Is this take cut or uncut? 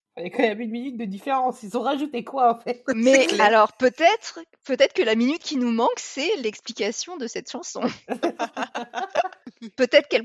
uncut